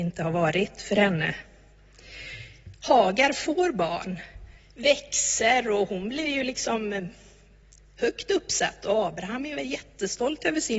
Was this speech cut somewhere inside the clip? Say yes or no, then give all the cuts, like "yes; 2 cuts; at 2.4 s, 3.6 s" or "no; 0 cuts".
no; 0 cuts